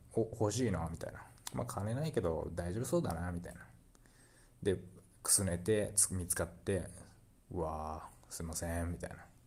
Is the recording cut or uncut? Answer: uncut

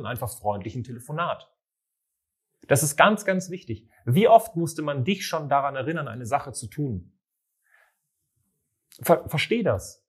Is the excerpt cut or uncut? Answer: uncut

